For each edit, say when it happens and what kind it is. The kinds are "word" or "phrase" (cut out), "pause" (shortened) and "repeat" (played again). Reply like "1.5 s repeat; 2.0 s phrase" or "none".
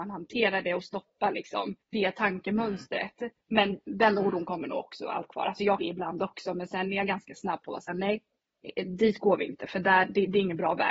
1.8 s pause; 3.4 s pause; 5.3 s word; 5.8 s phrase